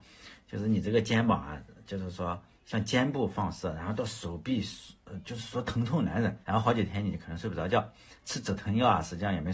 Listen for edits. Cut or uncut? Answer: cut